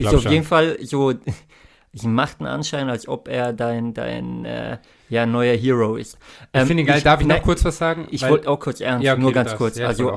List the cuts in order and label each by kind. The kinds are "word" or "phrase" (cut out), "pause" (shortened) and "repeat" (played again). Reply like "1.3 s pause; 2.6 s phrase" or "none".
none

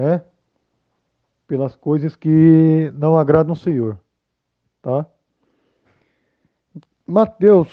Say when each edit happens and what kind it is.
none

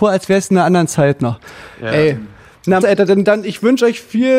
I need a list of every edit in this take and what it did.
2.8 s word

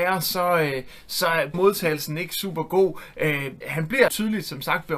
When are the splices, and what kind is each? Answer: 1.5 s word; 3.6 s word; 4.1 s word

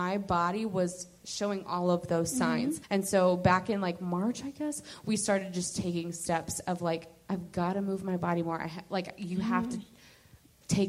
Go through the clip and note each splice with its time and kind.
2.8 s pause

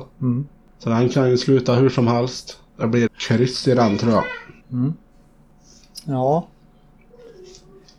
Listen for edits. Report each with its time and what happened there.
2.7 s pause; 3.1 s word; 4.6 s pause

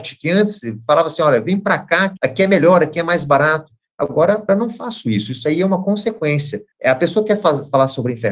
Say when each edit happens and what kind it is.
2.2 s word; 4.5 s word; 6.7 s pause

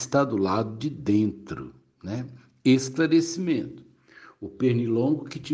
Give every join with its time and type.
none

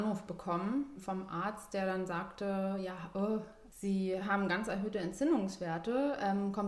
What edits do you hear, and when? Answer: none

